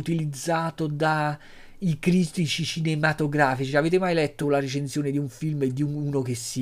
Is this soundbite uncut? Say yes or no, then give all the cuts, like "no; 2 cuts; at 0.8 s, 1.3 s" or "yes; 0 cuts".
yes; 0 cuts